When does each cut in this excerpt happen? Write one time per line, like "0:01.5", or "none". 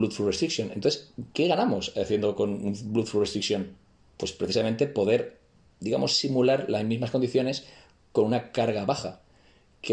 none